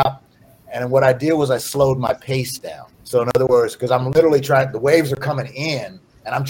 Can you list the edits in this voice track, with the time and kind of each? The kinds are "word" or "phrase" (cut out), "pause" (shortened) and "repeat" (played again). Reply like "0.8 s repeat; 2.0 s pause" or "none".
2.9 s pause